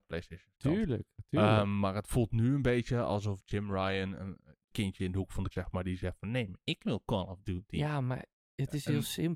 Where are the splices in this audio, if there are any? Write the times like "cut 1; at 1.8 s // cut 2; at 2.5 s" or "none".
cut 1; at 4.7 s // cut 2; at 5.5 s